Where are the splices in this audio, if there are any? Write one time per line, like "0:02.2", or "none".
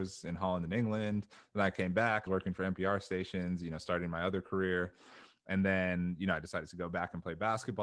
0:02.3